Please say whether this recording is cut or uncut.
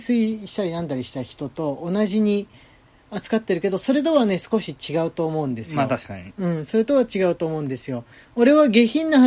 uncut